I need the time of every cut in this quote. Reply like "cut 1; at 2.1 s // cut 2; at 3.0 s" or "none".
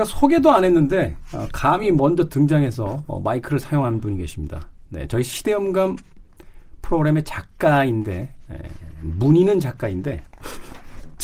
none